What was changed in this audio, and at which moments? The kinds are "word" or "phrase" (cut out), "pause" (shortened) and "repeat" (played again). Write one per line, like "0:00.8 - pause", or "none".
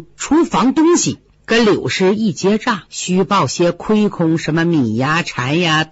0:01.3 - pause
0:02.9 - pause